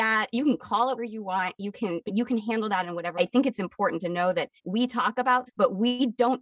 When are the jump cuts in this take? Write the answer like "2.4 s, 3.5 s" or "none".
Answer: 1.0 s, 2.1 s, 3.1 s, 4.6 s, 5.5 s

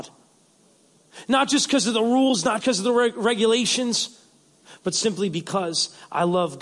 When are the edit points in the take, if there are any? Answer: 2.6 s

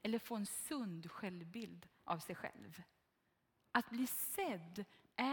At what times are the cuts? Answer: none

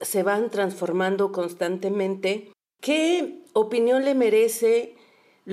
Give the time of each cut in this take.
none

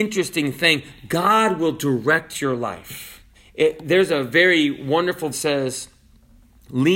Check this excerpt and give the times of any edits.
3.3 s, 5.3 s

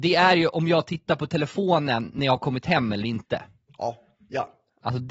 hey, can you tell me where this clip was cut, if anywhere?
none

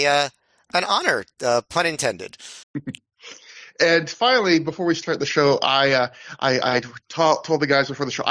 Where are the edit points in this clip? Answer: 2.6 s

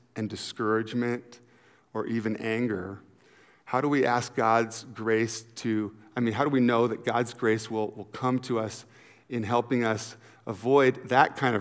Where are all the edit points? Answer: none

